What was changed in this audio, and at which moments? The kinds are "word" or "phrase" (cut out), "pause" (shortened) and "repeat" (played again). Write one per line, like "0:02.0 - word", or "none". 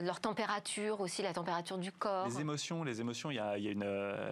none

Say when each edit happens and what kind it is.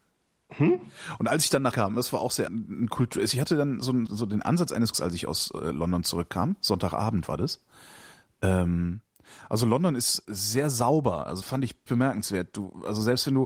0:01.7 - word
0:02.5 - word
0:04.1 - word
0:04.9 - word
0:10.2 - word
0:11.4 - word
0:11.9 - word

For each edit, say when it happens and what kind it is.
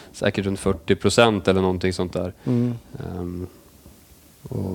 none

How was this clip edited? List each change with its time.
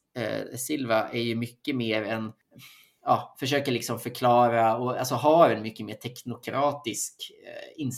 none

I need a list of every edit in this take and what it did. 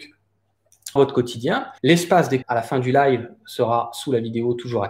0:01.0 - word
0:01.8 - pause
0:02.4 - word

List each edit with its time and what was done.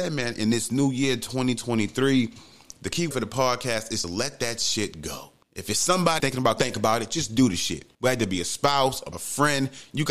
0:03.1 - word
0:04.0 - word
0:05.4 - pause
0:06.2 - phrase
0:06.6 - phrase
0:07.9 - pause
0:09.1 - word

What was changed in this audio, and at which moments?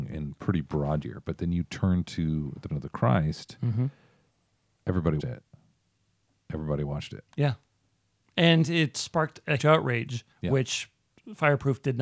0:01.0 - word
0:02.7 - word
0:05.2 - word
0:07.3 - pause
0:09.6 - word
0:10.3 - pause

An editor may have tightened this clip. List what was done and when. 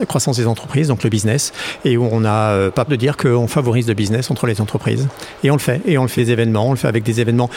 0:02.9 - word
0:06.2 - word

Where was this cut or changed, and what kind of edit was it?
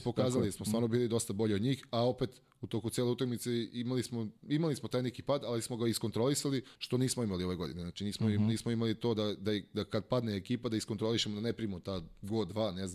0:04.4 - pause
0:06.8 - pause

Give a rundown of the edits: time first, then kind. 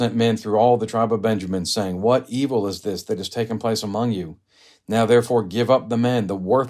none

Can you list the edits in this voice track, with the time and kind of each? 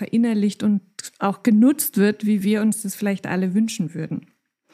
none

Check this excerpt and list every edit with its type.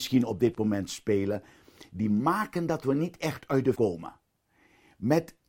0:03.7 - word

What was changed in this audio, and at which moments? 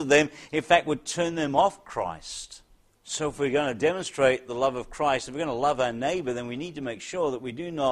0:02.8 - pause

